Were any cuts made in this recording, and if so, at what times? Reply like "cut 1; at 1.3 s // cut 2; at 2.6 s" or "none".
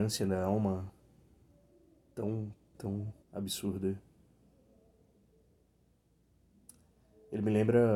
cut 1; at 2.7 s // cut 2; at 3.2 s